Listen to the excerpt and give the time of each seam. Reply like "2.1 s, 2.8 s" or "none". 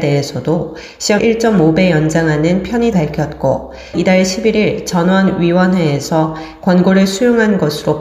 1.2 s, 2.9 s, 3.9 s